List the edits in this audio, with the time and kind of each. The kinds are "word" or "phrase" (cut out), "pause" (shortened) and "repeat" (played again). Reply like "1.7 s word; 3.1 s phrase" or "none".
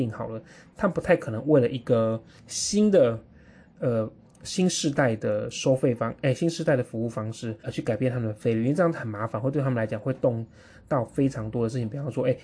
2.4 s word; 4.2 s pause; 7.6 s pause

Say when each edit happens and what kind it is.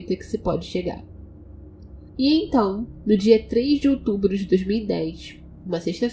none

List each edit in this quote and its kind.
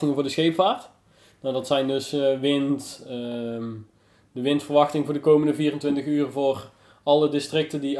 none

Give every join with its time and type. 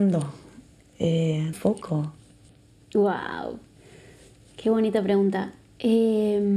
1.5 s phrase

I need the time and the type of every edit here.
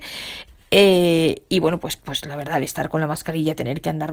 none

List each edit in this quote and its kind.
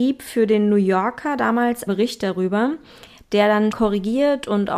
1.9 s word; 3.7 s word

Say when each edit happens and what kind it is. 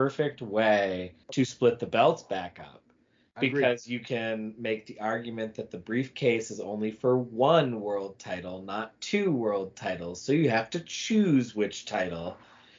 1.2 s pause

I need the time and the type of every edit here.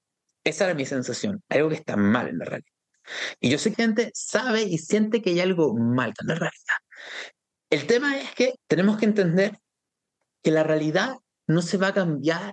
3.7 s word; 6.1 s word; 8.6 s pause

